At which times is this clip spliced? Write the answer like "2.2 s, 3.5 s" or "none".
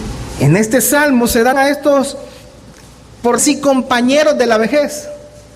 1.5 s, 3.4 s